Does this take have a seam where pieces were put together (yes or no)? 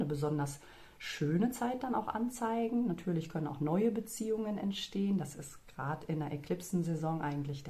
no